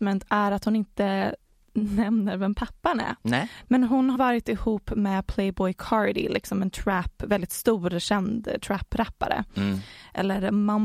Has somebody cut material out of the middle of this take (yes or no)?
yes